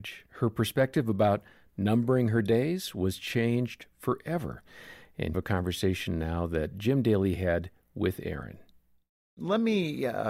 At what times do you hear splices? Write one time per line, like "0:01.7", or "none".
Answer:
0:05.3